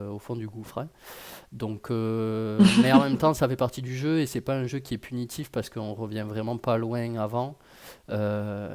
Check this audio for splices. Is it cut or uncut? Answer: uncut